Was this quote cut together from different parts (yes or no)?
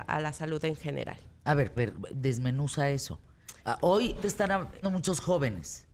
yes